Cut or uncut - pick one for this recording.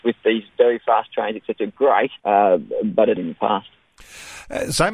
cut